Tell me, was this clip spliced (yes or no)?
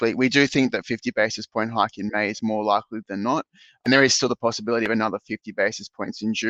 no